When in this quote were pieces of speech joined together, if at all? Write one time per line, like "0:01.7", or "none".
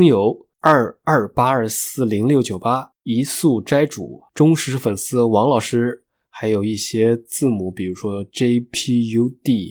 0:03.0
0:04.3